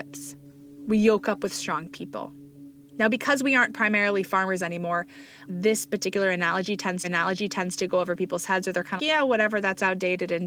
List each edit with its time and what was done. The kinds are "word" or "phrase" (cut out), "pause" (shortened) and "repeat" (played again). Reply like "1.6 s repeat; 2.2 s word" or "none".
5.5 s word; 7.0 s repeat; 9.0 s word